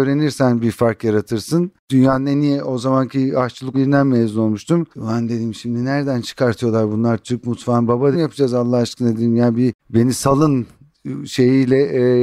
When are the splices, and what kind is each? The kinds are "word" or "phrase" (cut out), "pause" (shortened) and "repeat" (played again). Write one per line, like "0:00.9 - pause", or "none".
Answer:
0:01.8 - pause
0:03.7 - word
0:04.9 - pause
0:08.1 - phrase
0:09.8 - pause